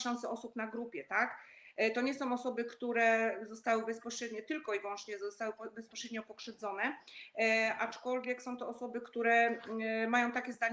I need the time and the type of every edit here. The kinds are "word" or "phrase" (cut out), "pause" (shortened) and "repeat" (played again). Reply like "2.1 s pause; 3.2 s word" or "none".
none